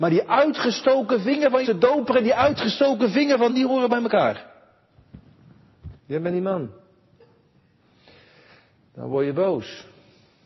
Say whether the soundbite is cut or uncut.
cut